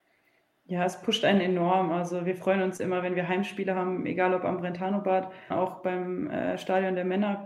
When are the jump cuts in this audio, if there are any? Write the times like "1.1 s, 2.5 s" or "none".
5.5 s